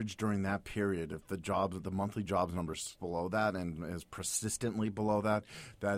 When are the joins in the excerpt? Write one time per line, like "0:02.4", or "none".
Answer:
0:03.0